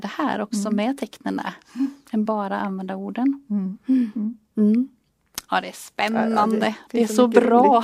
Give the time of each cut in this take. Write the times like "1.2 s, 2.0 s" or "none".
none